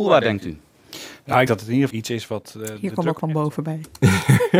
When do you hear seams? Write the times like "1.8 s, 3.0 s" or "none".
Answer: 1.5 s, 1.9 s, 3.2 s